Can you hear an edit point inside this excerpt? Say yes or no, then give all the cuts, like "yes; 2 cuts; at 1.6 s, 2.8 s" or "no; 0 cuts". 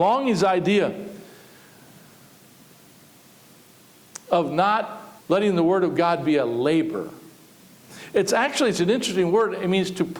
yes; 1 cut; at 5.2 s